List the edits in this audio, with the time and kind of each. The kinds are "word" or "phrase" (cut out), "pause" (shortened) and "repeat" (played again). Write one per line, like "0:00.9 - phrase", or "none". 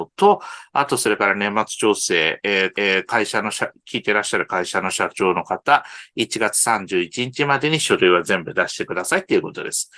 0:02.7 - repeat